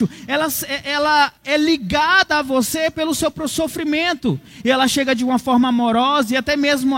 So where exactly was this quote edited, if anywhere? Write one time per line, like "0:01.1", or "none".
0:01.4